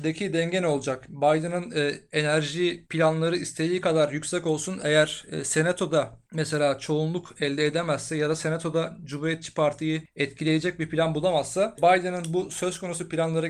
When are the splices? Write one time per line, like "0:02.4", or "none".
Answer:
none